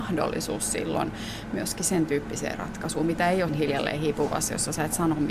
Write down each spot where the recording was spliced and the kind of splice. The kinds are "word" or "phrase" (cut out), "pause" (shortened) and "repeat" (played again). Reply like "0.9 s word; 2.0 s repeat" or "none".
3.5 s word